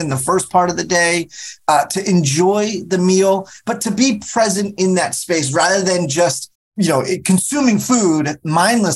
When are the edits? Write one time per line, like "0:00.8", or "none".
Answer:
0:06.6